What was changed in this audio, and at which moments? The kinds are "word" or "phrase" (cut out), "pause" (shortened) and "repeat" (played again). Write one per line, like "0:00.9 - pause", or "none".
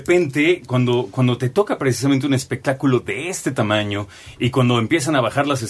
none